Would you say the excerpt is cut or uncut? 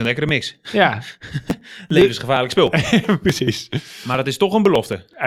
uncut